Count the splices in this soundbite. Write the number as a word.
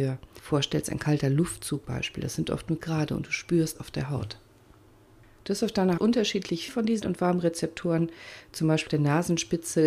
seven